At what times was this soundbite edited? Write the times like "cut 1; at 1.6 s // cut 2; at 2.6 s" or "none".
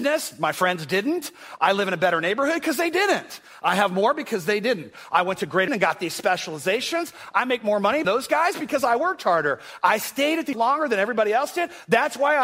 cut 1; at 5.7 s // cut 2; at 8.0 s // cut 3; at 10.5 s

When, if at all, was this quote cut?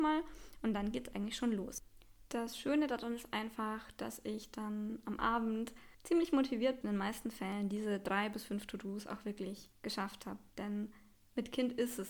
cut 1; at 5.9 s // cut 2; at 6.8 s // cut 3; at 9.7 s

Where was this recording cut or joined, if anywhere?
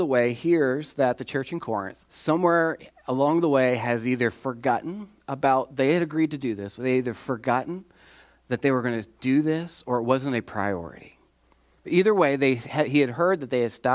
cut 1; at 2.0 s

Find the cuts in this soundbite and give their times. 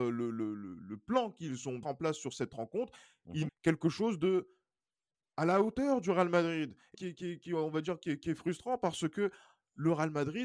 cut 1; at 1.8 s // cut 2; at 3.5 s // cut 3; at 6.9 s

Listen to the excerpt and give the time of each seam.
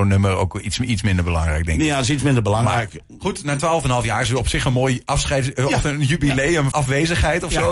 cut 1; at 6.7 s

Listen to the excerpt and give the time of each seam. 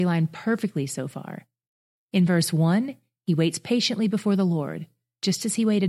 none

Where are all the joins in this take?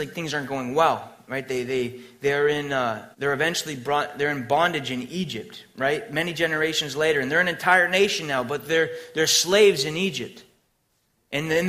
cut 1; at 3.1 s

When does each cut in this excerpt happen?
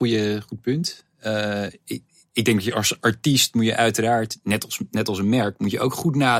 none

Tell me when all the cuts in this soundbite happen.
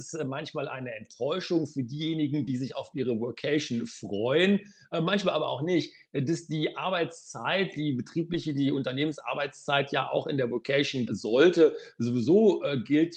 cut 1; at 11.1 s

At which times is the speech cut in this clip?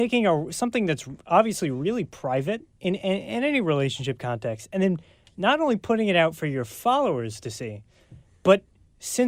none

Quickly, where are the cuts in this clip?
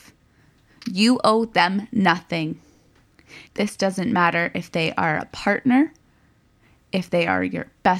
cut 1; at 3.5 s

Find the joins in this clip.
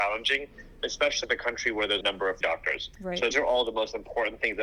cut 1; at 1.2 s // cut 2; at 2.0 s // cut 3; at 2.4 s // cut 4; at 2.9 s // cut 5; at 3.3 s

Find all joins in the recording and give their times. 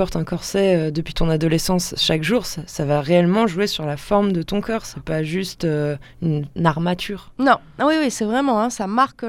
none

